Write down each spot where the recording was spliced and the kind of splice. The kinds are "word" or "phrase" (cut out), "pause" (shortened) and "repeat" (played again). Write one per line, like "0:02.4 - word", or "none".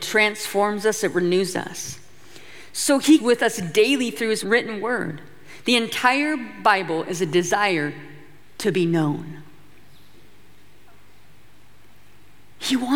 0:03.2 - word
0:04.4 - word